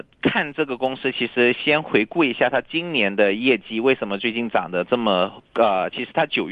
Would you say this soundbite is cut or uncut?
cut